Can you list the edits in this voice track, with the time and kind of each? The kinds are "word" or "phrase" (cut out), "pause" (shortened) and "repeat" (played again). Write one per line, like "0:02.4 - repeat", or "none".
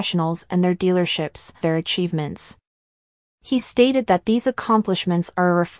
0:01.6 - phrase